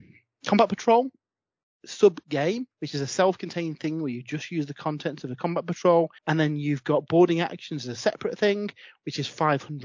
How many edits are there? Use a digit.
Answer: 2